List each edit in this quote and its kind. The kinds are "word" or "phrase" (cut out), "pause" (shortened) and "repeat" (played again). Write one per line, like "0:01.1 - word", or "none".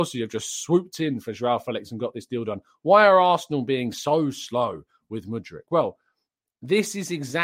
none